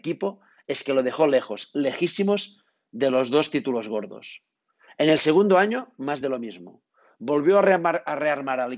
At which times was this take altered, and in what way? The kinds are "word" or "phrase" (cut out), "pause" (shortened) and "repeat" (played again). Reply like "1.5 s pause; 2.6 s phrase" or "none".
none